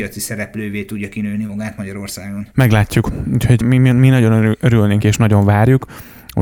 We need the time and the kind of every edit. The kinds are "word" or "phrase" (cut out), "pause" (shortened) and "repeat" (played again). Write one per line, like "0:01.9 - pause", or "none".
0:02.5 - pause
0:03.6 - word
0:05.0 - word